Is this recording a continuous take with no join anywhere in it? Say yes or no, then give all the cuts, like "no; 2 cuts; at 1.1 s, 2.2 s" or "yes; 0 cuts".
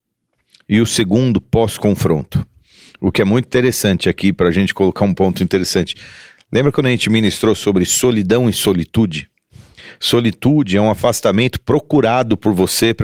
yes; 0 cuts